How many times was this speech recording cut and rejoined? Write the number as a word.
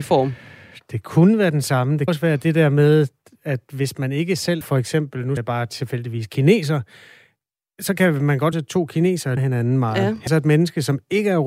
six